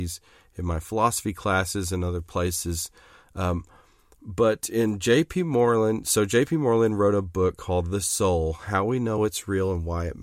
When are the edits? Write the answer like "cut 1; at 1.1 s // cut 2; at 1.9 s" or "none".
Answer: none